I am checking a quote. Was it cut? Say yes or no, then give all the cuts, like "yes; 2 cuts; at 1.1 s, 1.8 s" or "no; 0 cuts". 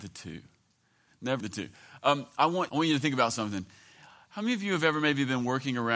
yes; 2 cuts; at 1.4 s, 2.7 s